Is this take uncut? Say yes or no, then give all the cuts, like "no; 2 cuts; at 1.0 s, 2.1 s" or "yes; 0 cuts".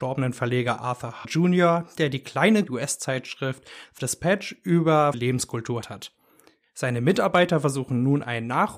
no; 5 cuts; at 1.2 s, 2.7 s, 4.0 s, 5.1 s, 5.8 s